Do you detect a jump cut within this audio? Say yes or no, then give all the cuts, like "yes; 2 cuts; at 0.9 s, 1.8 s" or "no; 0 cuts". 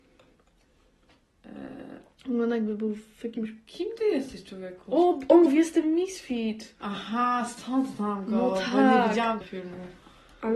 yes; 2 cuts; at 5.5 s, 9.4 s